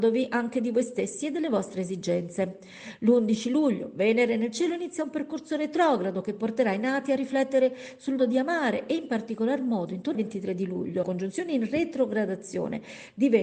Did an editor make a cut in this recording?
yes; 3 cuts; at 8.2 s, 10.1 s, 11.0 s

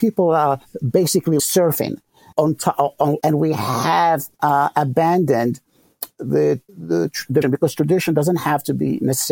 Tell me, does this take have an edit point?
yes; 6 cuts; at 1.4 s, 2.3 s, 3.2 s, 4.3 s, 6.7 s, 7.4 s

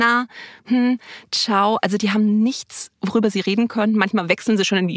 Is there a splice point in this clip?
no; 0 cuts

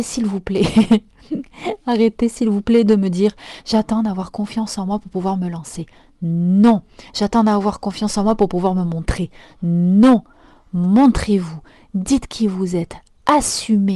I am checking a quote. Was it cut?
no; 0 cuts

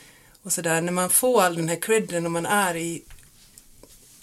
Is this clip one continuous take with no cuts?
yes; 0 cuts

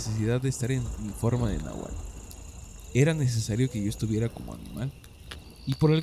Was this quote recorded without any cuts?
yes; 0 cuts

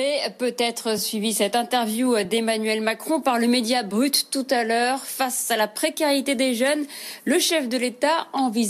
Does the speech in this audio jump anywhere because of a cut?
no; 0 cuts

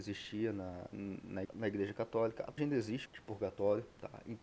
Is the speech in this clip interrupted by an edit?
yes; 3 cuts; at 1.4 s, 2.6 s, 3.1 s

